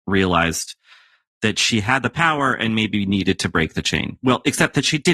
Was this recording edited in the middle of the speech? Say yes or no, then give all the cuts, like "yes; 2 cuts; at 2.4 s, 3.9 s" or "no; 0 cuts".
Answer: no; 0 cuts